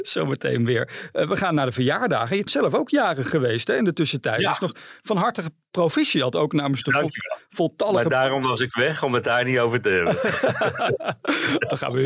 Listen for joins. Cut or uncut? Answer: cut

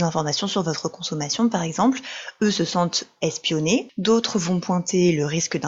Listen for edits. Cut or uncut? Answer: uncut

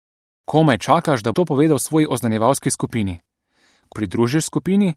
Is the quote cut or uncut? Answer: cut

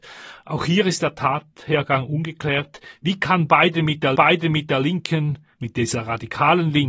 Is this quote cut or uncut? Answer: cut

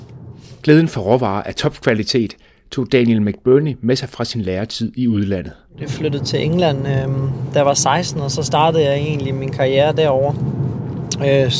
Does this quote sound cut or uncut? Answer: uncut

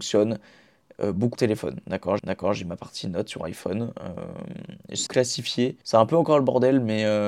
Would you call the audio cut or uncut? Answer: cut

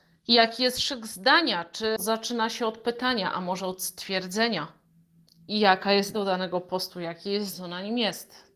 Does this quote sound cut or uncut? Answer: cut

